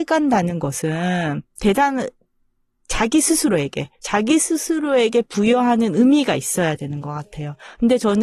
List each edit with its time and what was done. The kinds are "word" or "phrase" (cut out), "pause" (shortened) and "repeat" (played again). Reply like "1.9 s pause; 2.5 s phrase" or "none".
1.5 s pause